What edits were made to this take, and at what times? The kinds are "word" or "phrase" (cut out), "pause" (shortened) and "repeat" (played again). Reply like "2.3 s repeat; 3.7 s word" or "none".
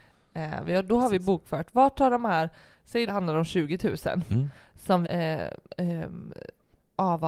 3.1 s phrase; 5.0 s word; 5.6 s pause